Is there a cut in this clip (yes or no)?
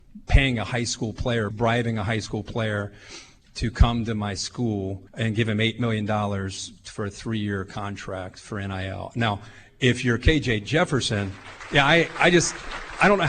yes